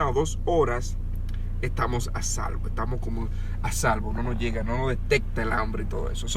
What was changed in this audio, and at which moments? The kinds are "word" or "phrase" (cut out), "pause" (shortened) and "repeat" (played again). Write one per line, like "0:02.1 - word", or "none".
none